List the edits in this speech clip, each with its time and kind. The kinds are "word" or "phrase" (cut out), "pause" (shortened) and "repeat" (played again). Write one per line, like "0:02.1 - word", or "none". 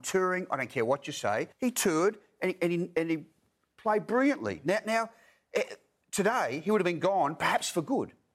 0:01.5 - pause

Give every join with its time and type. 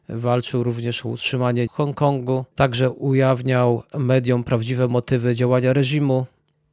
0:01.7 - phrase
0:02.5 - pause

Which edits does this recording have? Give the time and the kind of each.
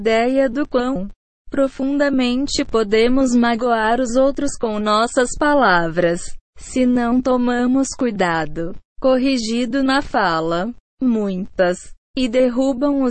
0:06.5 - pause

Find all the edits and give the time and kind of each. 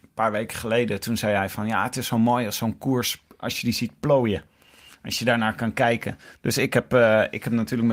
none

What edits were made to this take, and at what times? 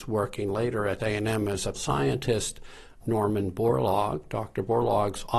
0:01.0 - word
0:01.7 - word
0:03.0 - word

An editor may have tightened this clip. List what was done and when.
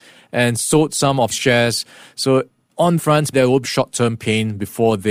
0:01.3 - word
0:03.0 - word
0:03.3 - word
0:03.6 - word

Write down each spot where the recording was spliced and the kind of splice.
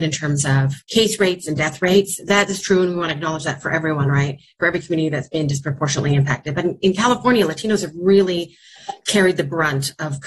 none

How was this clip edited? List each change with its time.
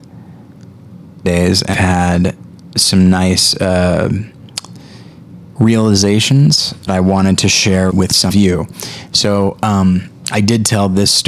0:01.2 - phrase
0:01.7 - word
0:06.9 - phrase
0:07.9 - word
0:08.3 - word

